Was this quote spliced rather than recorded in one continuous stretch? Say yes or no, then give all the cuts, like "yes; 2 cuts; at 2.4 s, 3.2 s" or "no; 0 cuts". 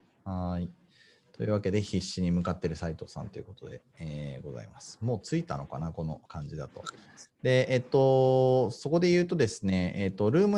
yes; 1 cut; at 6.3 s